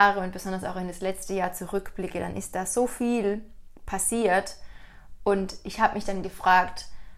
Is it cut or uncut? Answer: uncut